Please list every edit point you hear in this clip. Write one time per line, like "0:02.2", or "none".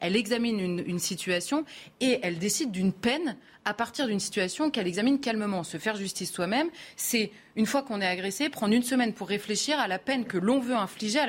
none